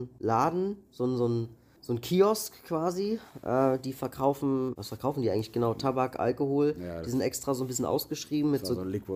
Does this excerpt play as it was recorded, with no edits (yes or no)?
yes